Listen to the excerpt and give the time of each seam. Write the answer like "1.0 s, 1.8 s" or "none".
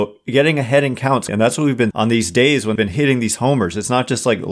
1.3 s, 1.9 s, 2.8 s